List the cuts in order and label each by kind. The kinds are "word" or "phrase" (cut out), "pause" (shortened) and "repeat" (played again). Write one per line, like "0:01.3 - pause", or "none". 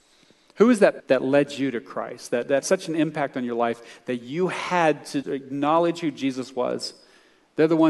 0:01.0 - word
0:02.6 - word
0:05.2 - word